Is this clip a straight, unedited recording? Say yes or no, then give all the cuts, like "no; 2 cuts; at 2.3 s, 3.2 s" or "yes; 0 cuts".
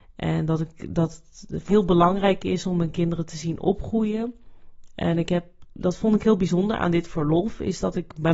no; 1 cut; at 1.7 s